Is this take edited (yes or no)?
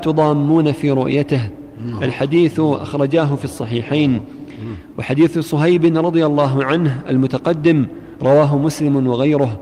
no